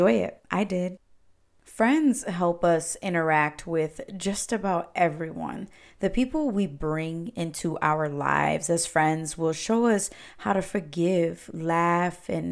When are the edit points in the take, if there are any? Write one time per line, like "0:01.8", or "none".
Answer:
none